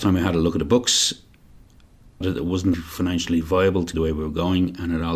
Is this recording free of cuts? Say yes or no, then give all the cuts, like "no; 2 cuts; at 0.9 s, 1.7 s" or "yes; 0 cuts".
no; 3 cuts; at 2.2 s, 2.7 s, 3.9 s